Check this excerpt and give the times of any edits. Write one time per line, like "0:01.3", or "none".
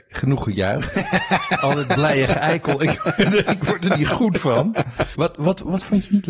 none